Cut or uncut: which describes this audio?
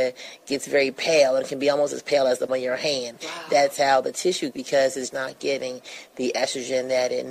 cut